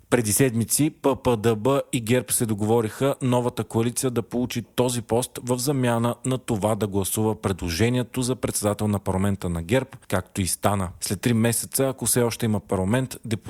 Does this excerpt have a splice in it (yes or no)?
no